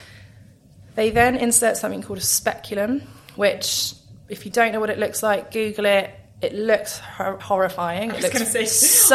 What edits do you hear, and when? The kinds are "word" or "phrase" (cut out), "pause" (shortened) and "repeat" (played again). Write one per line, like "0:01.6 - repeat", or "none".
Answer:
0:04.2 - pause
0:07.4 - word